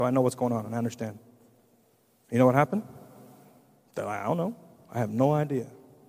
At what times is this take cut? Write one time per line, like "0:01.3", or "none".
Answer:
none